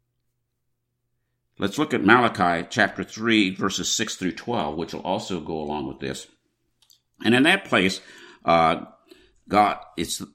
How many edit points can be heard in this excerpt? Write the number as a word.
zero